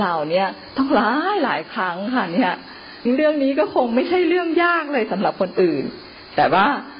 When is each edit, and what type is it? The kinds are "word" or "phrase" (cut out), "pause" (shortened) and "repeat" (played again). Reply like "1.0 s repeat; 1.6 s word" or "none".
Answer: 3.1 s phrase